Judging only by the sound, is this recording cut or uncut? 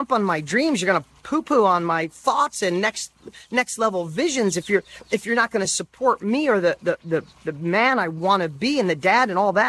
uncut